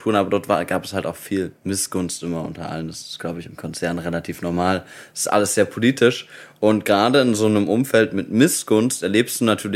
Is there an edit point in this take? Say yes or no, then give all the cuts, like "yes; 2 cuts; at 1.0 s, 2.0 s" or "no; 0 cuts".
no; 0 cuts